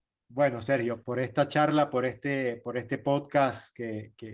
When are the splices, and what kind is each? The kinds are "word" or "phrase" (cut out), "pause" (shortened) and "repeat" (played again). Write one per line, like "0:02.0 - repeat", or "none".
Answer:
0:01.0 - phrase